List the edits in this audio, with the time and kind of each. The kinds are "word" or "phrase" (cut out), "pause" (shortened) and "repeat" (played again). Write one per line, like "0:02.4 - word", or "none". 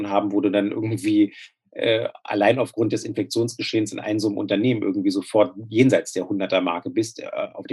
none